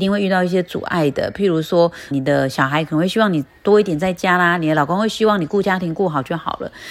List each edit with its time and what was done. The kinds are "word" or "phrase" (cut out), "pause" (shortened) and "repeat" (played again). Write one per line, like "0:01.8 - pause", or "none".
0:02.1 - word